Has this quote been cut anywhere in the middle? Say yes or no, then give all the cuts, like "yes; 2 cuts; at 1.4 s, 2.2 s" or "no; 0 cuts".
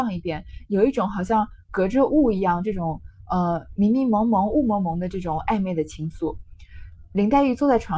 no; 0 cuts